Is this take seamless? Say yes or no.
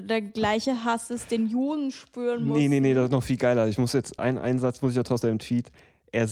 no